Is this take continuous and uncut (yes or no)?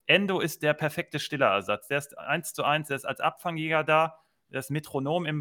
yes